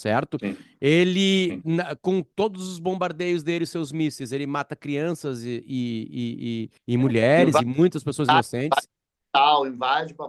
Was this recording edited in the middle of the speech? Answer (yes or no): yes